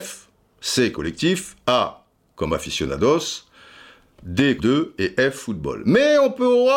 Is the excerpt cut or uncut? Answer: cut